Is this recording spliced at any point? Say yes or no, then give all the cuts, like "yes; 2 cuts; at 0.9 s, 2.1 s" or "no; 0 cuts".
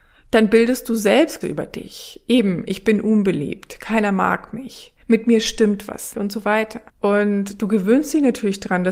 yes; 4 cuts; at 1.4 s, 5.0 s, 6.1 s, 6.9 s